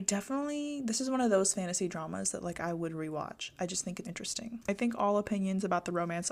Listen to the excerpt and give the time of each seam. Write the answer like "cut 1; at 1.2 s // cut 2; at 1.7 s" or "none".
cut 1; at 4.0 s